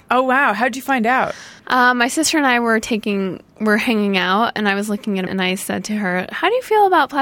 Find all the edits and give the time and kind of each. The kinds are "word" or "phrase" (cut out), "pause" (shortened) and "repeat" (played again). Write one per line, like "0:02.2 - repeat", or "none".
0:01.6 - pause
0:05.3 - word